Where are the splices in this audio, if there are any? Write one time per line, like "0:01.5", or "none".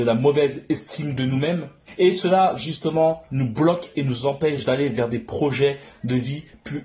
none

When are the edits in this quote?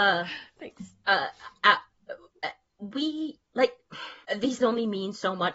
0:04.6

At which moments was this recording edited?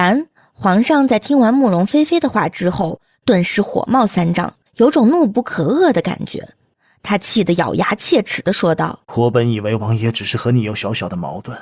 0:04.7
0:09.0

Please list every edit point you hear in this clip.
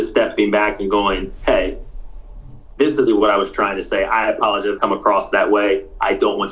0:03.1
0:04.8

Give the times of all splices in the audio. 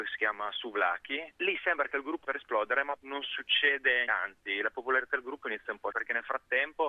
0:02.2
0:03.0
0:04.1
0:05.9

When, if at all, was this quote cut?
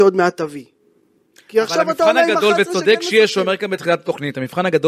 none

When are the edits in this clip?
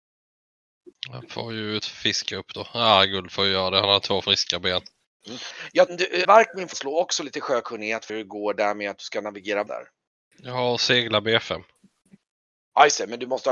0:01.8
0:05.9
0:06.2
0:06.7
0:08.1
0:09.7

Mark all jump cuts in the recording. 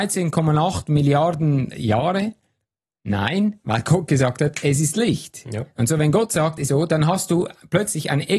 0:01.7
0:06.7

